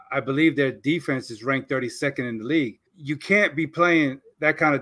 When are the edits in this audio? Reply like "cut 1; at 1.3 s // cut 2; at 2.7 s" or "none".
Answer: cut 1; at 2.9 s